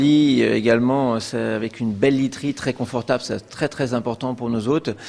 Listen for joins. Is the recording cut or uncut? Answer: uncut